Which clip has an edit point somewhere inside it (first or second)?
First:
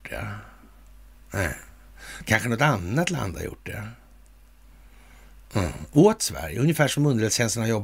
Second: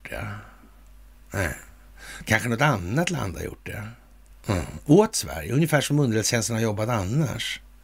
second